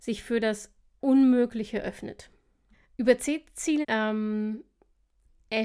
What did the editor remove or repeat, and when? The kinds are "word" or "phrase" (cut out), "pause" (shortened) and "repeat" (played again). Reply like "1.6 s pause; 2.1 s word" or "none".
0.9 s word; 2.7 s pause; 3.8 s word